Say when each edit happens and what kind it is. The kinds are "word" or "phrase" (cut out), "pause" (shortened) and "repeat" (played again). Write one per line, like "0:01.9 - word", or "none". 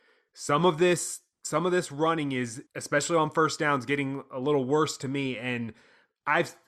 0:02.7 - pause